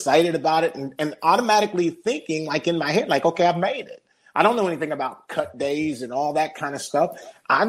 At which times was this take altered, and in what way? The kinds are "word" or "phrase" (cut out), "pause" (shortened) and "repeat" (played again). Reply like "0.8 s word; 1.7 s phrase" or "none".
none